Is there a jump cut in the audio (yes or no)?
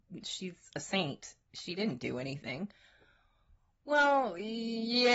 no